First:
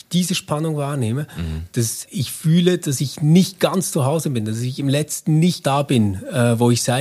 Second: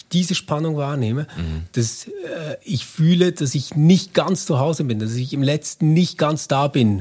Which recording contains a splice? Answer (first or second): first